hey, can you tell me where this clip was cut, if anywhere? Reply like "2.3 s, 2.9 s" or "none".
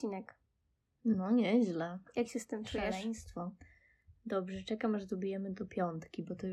none